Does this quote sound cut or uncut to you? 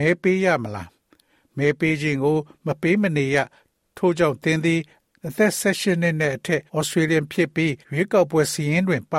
cut